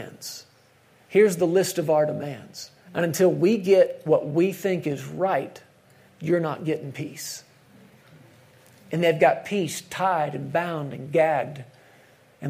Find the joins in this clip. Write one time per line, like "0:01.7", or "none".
0:02.8